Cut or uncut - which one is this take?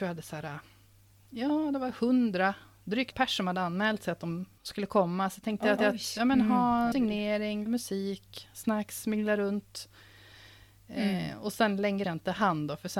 cut